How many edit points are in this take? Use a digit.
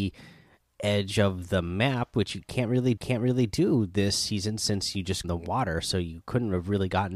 2